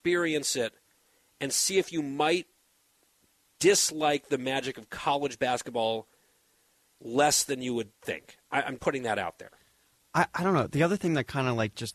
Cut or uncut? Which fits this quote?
cut